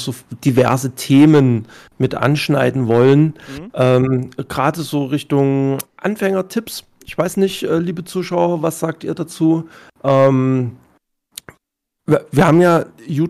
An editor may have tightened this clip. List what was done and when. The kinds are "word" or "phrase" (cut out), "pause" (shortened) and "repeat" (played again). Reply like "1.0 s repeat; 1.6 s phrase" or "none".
none